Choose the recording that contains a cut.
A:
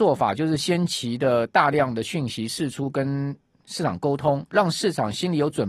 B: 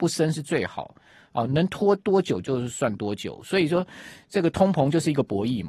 A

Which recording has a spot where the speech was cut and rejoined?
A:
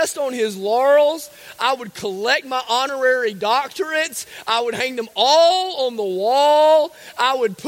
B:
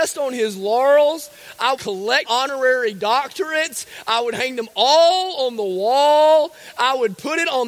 B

